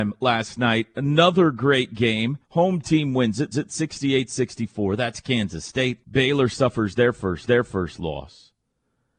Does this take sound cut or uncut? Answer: cut